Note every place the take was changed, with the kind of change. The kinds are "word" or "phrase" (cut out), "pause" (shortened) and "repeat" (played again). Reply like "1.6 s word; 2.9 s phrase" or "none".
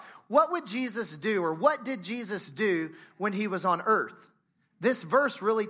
none